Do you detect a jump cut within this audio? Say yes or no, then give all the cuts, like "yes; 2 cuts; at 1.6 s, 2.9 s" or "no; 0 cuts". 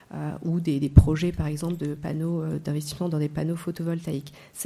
no; 0 cuts